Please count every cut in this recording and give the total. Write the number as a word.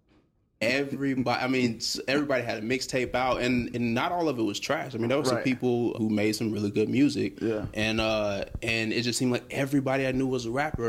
one